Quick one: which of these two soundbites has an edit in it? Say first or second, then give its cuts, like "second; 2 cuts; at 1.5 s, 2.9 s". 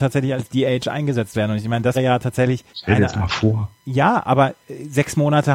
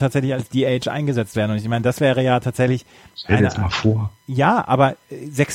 first; 2 cuts; at 1.9 s, 2.7 s